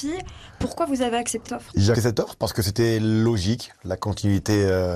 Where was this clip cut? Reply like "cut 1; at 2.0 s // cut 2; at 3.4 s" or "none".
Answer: cut 1; at 1.4 s // cut 2; at 1.9 s

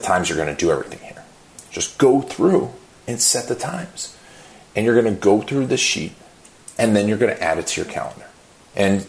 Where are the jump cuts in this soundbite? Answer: none

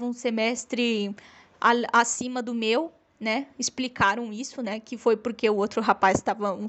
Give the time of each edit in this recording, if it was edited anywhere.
none

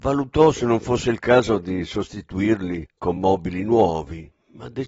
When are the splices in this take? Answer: none

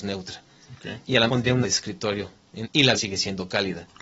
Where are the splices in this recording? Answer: cut 1; at 1.3 s // cut 2; at 1.6 s // cut 3; at 2.6 s // cut 4; at 2.9 s

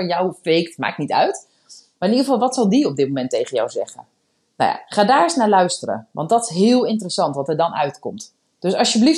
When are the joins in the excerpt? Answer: none

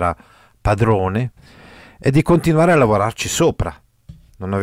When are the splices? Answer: none

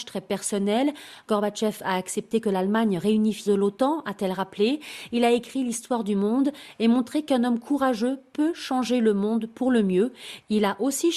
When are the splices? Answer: cut 1; at 3.5 s

